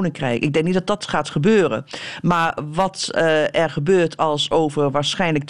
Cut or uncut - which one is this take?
uncut